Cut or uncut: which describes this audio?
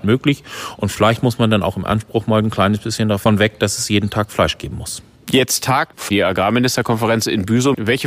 uncut